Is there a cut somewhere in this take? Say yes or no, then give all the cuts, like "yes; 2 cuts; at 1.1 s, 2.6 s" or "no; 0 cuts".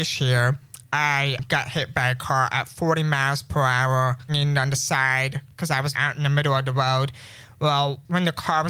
yes; 2 cuts; at 4.3 s, 5.9 s